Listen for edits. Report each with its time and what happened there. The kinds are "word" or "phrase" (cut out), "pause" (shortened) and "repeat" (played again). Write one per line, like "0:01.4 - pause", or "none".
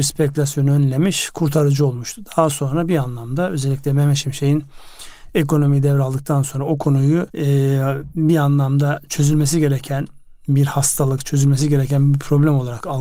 0:07.3 - pause